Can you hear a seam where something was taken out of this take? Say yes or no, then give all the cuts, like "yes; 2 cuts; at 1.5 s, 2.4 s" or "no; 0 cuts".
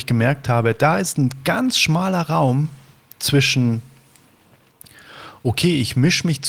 no; 0 cuts